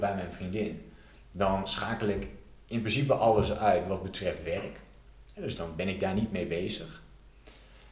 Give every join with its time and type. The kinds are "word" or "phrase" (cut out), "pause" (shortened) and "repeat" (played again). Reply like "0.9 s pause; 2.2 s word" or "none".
none